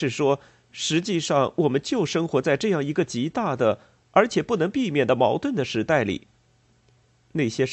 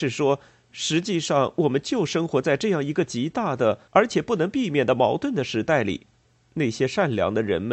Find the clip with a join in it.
second; 2 cuts; at 3.9 s, 6.2 s

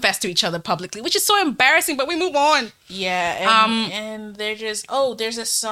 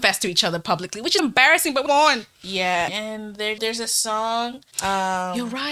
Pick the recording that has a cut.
second; 5 cuts; at 1.2 s, 1.9 s, 2.9 s, 3.6 s, 4.7 s

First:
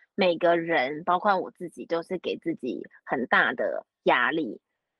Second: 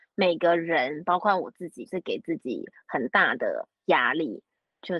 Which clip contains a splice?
second; 1 cut; at 1.9 s

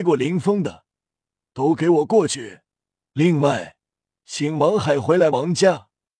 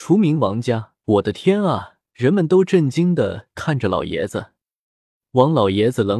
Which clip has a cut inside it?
second; 2 cuts; at 1.0 s, 2.1 s

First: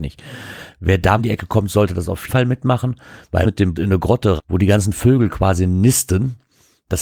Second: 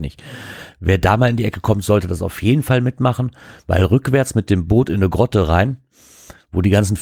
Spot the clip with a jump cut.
first; 5 cuts; at 1.2 s, 2.3 s, 3.4 s, 3.8 s, 4.4 s

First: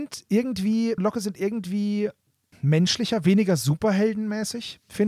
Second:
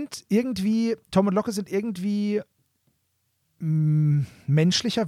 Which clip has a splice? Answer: first; 2 cuts; at 1.0 s, 2.5 s

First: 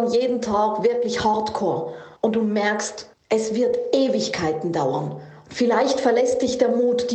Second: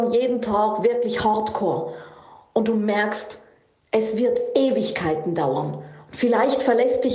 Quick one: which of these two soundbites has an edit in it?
first; 2 cuts; at 2.2 s, 3.1 s

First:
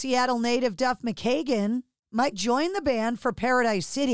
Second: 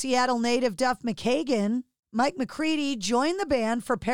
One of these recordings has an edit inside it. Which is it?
first; 1 cut; at 2.3 s

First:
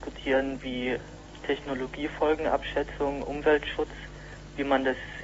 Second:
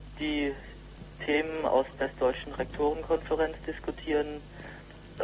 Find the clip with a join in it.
second; 1 cut; at 1.9 s

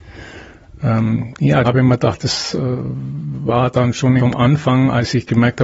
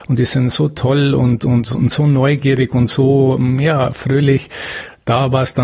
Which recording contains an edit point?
first; 2 cuts; at 1.6 s, 4.2 s

